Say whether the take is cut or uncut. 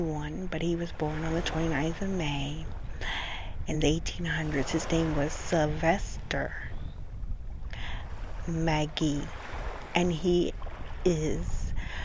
uncut